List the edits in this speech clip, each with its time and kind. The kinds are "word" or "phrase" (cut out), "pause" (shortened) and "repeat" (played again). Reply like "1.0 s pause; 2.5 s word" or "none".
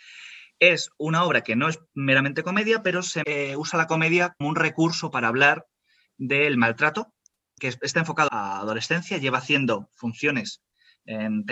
3.2 s word; 4.4 s word; 7.6 s word; 8.3 s word